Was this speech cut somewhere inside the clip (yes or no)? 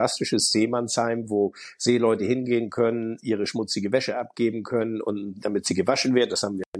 no